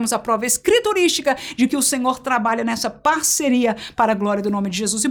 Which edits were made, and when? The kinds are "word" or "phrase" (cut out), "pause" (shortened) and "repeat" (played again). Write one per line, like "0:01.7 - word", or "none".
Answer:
none

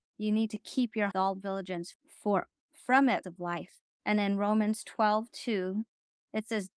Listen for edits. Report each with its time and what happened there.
0:01.1 - phrase
0:01.9 - word
0:03.2 - phrase
0:03.8 - pause

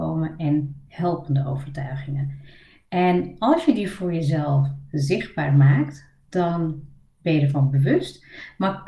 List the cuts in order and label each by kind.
none

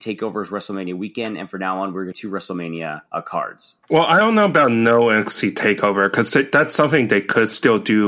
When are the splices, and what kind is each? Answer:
0:02.1 - phrase
0:03.1 - pause
0:03.8 - pause

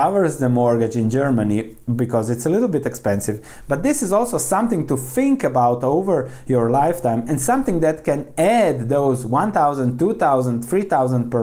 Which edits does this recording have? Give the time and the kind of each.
none

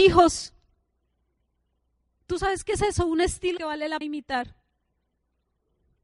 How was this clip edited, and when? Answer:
0:03.6 - phrase
0:04.0 - word

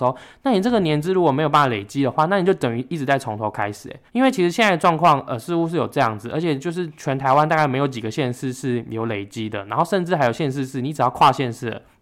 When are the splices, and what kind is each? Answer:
0:04.1 - pause

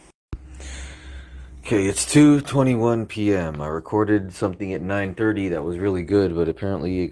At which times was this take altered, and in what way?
none

